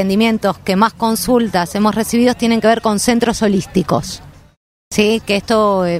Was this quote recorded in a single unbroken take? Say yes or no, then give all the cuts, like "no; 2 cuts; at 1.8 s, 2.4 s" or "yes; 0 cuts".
yes; 0 cuts